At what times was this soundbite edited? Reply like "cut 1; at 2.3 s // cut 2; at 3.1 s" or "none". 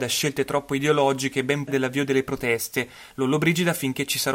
cut 1; at 1.7 s

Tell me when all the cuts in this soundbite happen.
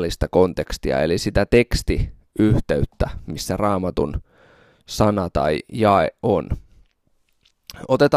none

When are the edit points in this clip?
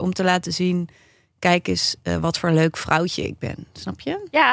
none

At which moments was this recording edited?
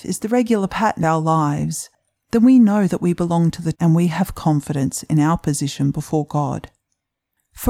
cut 1; at 1.0 s // cut 2; at 3.7 s

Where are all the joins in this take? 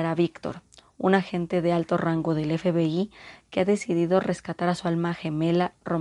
none

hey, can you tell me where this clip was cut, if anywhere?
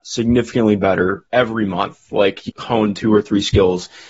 cut 1; at 1.3 s // cut 2; at 2.5 s

